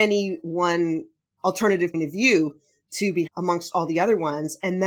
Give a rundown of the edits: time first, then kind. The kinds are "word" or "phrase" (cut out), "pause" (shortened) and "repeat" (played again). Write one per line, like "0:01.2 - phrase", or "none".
0:01.9 - word
0:03.3 - word